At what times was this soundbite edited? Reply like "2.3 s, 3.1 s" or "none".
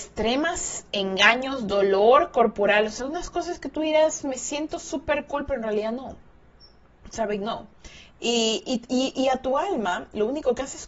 none